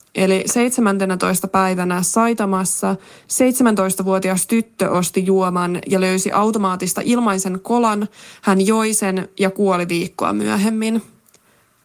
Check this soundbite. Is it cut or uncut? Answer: uncut